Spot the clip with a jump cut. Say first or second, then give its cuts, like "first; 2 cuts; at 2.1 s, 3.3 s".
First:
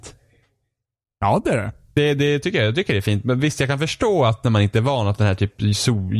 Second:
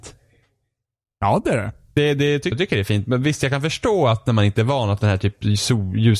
second; 1 cut; at 2.5 s